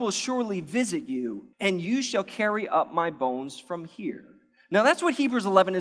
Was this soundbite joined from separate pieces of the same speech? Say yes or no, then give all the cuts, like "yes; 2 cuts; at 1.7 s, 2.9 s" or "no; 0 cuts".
yes; 1 cut; at 1.5 s